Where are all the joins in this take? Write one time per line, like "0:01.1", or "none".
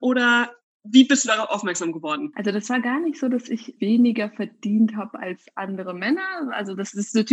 none